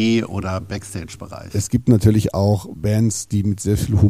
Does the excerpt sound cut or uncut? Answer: uncut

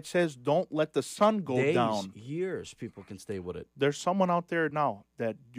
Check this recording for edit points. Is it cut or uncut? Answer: uncut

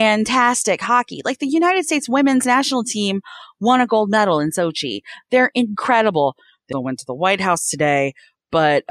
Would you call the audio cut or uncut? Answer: cut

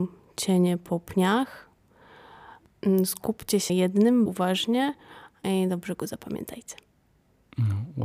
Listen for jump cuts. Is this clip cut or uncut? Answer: cut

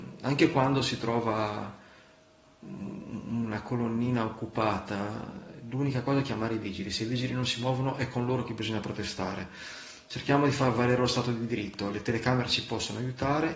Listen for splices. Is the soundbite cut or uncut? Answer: uncut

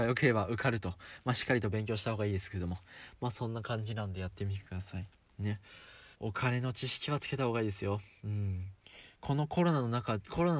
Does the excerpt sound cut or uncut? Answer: cut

